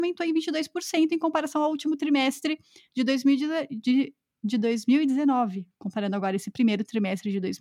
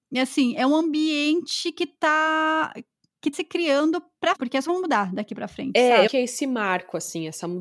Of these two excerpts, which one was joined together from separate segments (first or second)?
second